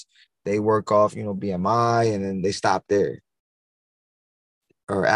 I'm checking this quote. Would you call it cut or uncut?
uncut